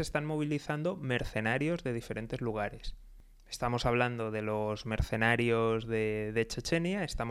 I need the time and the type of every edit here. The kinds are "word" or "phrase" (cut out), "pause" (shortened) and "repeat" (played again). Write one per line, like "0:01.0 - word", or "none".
none